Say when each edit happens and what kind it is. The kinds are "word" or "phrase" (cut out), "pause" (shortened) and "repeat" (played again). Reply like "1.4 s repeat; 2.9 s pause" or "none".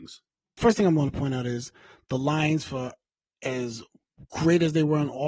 none